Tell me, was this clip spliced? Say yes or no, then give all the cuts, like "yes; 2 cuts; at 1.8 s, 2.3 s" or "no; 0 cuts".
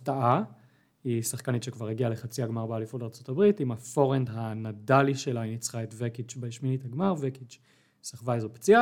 no; 0 cuts